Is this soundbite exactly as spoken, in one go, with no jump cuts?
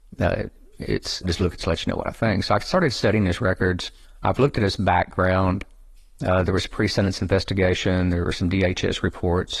no; 3 cuts; at 1.2 s, 1.6 s, 4.0 s

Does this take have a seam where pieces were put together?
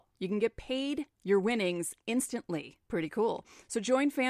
yes; 2 cuts; at 1.1 s, 2.8 s

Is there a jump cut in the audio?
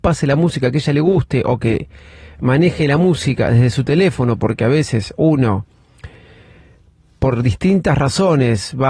no; 0 cuts

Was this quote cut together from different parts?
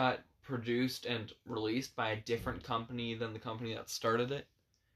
no; 0 cuts

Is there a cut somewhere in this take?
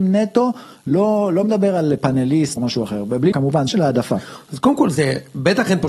yes; 3 cuts; at 2.6 s, 3.3 s, 3.7 s

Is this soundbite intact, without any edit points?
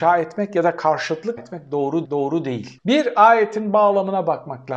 no; 2 cuts; at 1.4 s, 2.0 s

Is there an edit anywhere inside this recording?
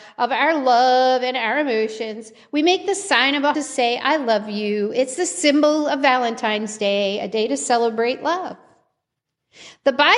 yes; 1 cut; at 3.5 s

